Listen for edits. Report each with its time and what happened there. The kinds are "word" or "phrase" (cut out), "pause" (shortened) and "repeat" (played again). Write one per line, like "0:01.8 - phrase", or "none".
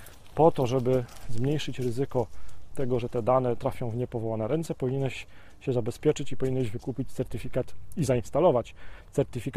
none